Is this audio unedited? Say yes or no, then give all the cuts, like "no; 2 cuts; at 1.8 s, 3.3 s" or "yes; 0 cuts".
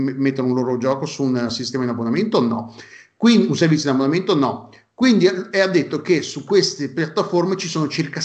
yes; 0 cuts